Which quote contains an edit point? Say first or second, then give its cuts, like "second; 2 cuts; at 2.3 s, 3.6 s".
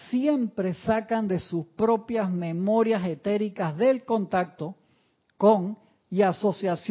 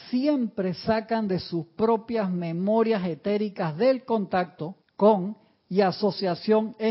second; 1 cut; at 4.8 s